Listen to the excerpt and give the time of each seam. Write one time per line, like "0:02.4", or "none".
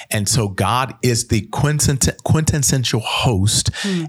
none